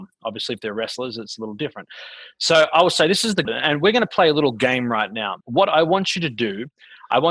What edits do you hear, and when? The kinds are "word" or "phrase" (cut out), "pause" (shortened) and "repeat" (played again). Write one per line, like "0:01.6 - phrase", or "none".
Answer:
0:03.4 - word
0:05.4 - pause

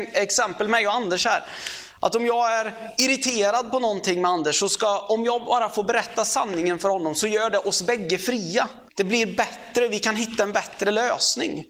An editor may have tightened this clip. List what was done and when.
0:08.9 - pause

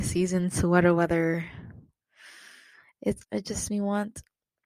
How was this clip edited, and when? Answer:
0:03.2 - word
0:03.7 - word

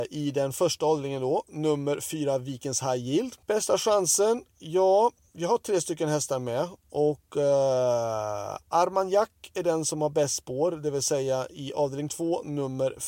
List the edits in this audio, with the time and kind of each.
0:03.4 - pause
0:04.5 - pause

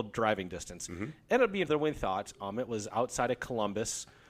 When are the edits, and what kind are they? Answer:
0:01.7 - word

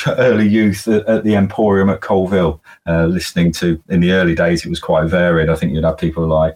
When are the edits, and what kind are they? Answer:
none

